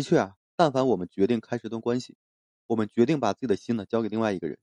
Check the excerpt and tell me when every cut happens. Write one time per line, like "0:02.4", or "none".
none